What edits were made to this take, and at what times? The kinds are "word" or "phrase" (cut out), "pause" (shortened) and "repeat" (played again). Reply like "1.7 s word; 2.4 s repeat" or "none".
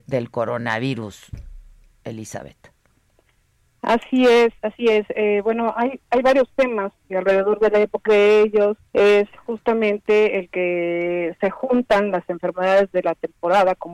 4.6 s pause; 7.1 s word; 8.1 s phrase; 8.9 s pause

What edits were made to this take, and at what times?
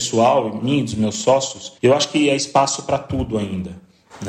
1.8 s pause

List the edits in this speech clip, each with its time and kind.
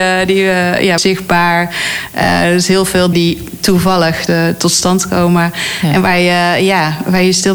1.0 s word; 3.1 s word; 4.3 s phrase

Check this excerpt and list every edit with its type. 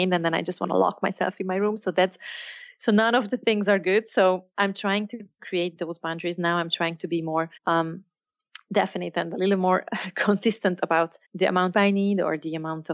7.6 s pause; 11.2 s pause; 11.7 s phrase

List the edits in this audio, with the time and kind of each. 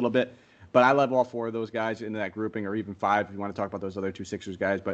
none

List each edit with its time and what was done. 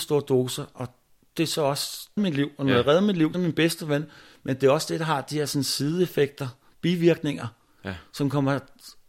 2.2 s phrase; 3.3 s phrase

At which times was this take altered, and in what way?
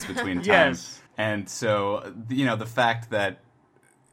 1.1 s pause

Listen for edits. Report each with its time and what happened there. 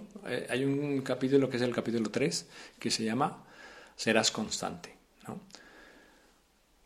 none

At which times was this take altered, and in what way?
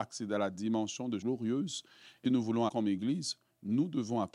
1.2 s word; 2.2 s word; 2.7 s word

